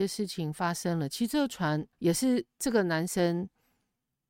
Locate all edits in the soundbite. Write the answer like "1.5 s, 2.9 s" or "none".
1.9 s